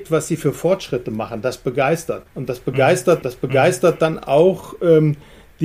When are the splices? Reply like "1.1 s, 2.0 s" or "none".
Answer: 2.3 s, 3.2 s